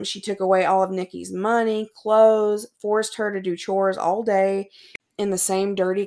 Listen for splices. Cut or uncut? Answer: uncut